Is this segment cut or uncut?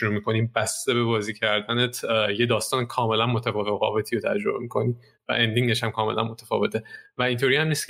uncut